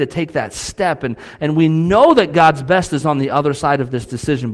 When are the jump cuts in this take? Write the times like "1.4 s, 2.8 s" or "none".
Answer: none